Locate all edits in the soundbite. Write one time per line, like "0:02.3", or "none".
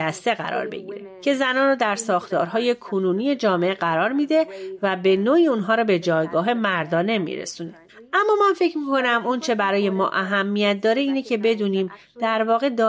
none